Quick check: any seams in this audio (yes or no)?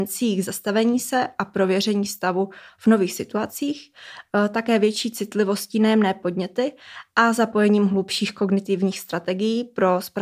no